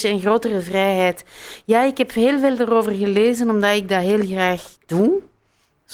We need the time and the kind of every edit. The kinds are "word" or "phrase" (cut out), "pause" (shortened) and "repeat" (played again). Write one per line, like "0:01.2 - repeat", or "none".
0:04.8 - pause